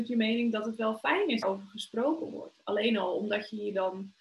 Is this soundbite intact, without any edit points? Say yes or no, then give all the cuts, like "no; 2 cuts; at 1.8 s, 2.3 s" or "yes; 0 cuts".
no; 1 cut; at 1.4 s